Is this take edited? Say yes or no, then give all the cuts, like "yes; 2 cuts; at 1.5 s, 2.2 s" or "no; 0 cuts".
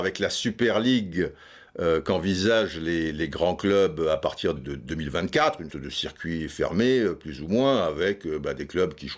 yes; 2 cuts; at 4.6 s, 5.7 s